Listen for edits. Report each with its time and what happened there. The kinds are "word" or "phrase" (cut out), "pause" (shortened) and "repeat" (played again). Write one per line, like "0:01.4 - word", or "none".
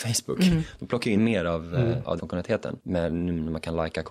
0:01.2 - word
0:02.2 - word